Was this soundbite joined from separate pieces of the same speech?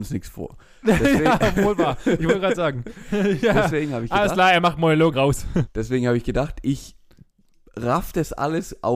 yes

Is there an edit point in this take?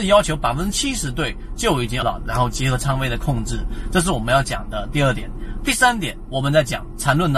yes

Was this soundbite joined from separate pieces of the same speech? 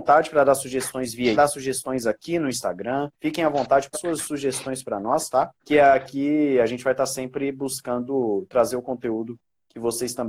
yes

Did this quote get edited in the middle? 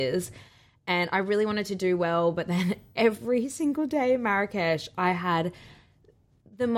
no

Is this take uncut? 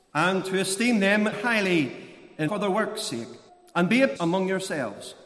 no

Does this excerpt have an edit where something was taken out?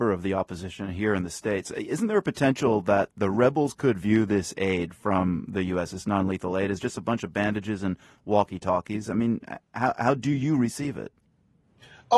no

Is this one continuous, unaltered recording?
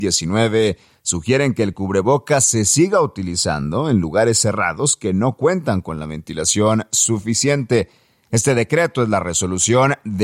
yes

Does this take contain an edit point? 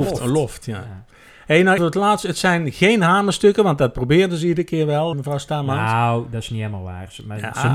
yes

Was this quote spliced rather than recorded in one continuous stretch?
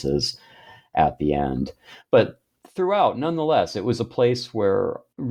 no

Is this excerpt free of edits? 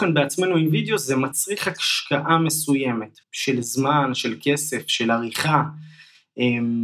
no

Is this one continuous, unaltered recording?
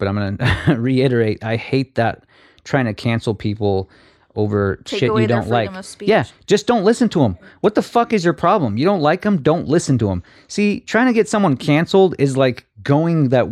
yes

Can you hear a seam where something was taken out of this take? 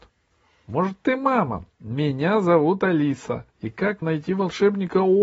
yes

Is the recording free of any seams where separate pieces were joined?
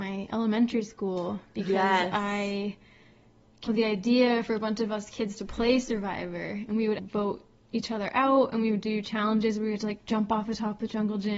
no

